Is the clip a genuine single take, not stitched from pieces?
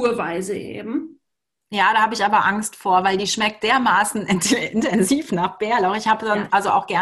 yes; 0 cuts

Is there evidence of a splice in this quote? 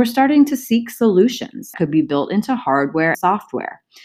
yes; 2 cuts; at 1.7 s, 3.1 s

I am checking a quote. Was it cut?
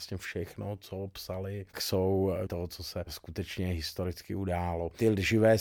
yes; 2 cuts; at 1.7 s, 2.5 s

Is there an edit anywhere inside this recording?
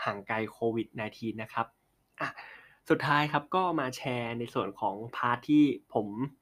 no; 0 cuts

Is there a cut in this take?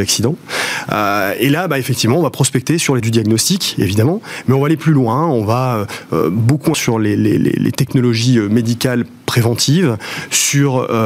yes; 2 cuts; at 3.0 s, 6.7 s

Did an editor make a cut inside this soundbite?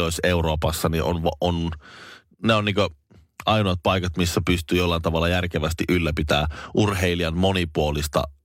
no; 0 cuts

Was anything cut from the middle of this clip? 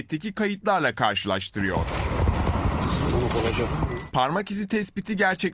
yes; 1 cut; at 3.7 s

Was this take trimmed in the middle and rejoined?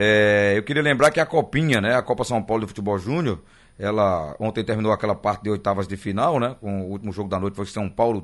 no; 0 cuts

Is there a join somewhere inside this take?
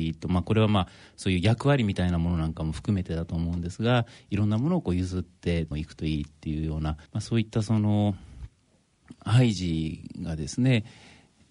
yes; 2 cuts; at 5.7 s, 7.1 s

